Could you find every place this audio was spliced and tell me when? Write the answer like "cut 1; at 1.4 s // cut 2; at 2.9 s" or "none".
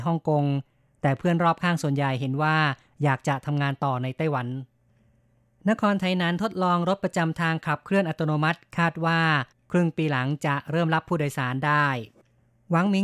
none